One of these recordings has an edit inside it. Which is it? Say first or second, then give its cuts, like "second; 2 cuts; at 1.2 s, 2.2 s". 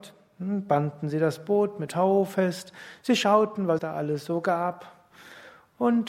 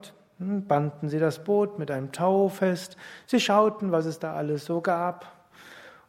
first; 2 cuts; at 1.9 s, 3.8 s